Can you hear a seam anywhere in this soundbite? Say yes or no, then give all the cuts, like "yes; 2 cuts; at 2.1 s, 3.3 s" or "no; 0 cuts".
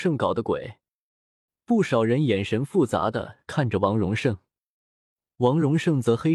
no; 0 cuts